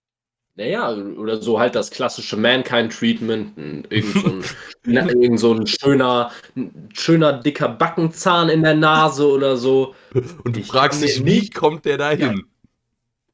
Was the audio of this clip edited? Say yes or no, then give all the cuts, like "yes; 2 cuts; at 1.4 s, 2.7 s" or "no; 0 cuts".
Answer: no; 0 cuts